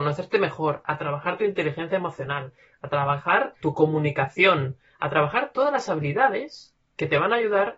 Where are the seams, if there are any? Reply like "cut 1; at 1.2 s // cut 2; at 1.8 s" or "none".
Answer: cut 1; at 3.6 s